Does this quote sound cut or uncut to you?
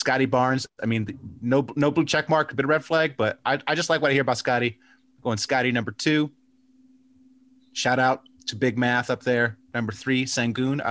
uncut